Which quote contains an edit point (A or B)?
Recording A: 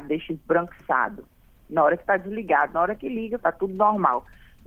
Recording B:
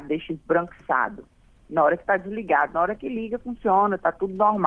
A